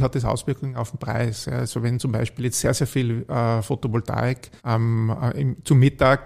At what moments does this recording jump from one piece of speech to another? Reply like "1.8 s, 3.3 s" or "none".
4.6 s